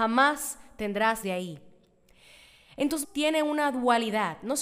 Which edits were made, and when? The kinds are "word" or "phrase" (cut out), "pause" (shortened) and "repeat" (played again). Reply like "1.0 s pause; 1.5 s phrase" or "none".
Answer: 1.2 s word; 3.0 s word